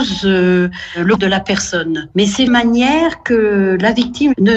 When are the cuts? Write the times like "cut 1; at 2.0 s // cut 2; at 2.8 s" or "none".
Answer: cut 1; at 1.2 s // cut 2; at 2.5 s